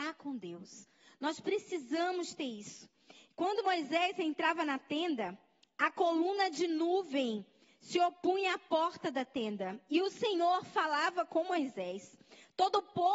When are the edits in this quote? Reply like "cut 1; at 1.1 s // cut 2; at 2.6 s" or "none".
none